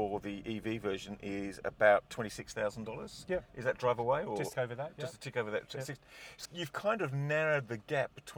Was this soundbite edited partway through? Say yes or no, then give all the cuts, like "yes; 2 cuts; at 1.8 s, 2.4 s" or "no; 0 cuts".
yes; 2 cuts; at 4.5 s, 6.4 s